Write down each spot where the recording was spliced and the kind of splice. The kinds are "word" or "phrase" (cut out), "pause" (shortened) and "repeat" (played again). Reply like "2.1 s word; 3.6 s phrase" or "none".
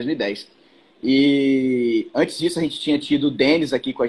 none